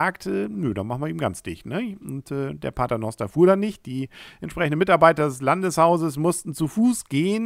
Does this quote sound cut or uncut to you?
uncut